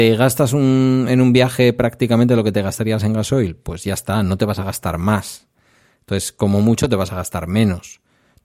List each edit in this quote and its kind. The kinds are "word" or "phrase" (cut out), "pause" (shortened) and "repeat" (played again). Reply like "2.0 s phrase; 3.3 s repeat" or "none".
none